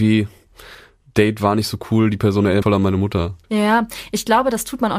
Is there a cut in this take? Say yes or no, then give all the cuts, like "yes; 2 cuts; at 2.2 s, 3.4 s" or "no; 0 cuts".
yes; 2 cuts; at 2.6 s, 3.4 s